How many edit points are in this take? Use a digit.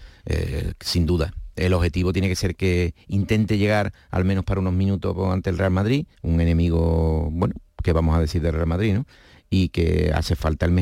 1